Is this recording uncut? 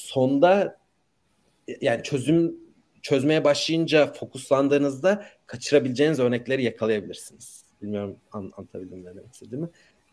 yes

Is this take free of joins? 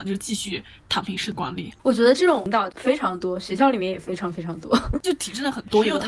no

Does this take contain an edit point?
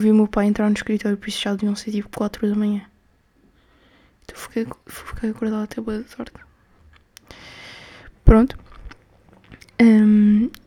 no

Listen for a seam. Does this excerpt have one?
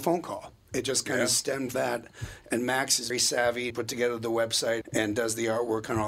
yes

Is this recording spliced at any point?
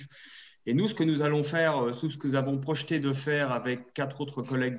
no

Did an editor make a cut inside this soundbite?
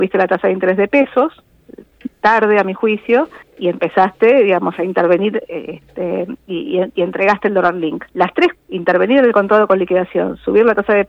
yes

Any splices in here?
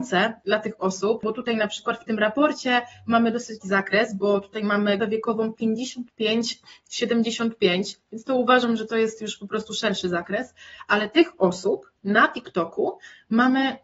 yes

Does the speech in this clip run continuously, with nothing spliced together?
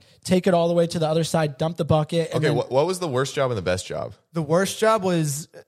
yes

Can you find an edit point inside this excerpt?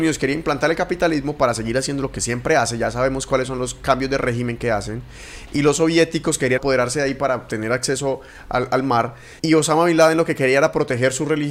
yes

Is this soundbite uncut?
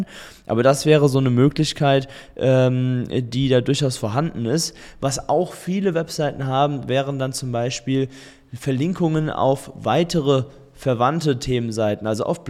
yes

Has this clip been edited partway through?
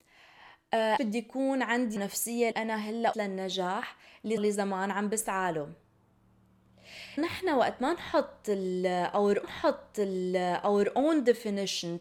yes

